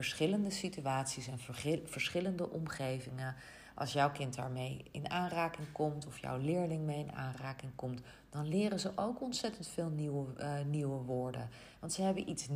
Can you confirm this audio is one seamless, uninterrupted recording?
yes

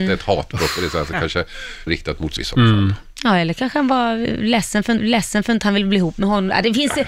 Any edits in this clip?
yes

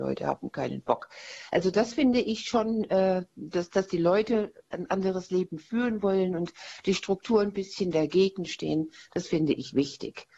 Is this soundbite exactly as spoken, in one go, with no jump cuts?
yes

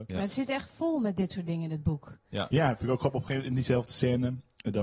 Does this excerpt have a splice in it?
no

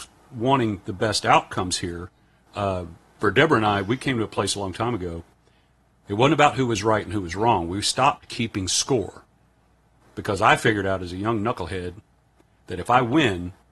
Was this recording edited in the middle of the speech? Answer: no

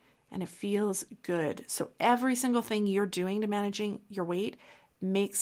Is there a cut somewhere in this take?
no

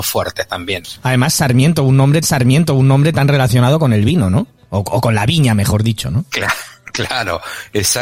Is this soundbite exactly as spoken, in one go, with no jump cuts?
no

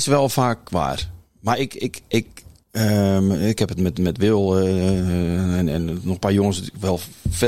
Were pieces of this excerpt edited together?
no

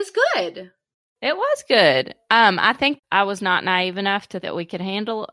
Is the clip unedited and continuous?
no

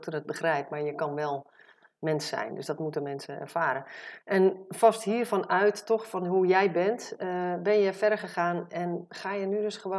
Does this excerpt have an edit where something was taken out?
no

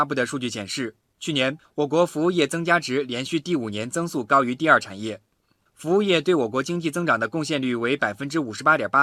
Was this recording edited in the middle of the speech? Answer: no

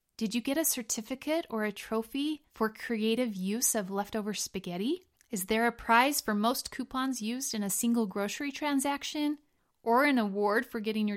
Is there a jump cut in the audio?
no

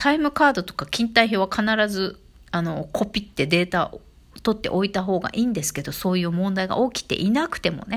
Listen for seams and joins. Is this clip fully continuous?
no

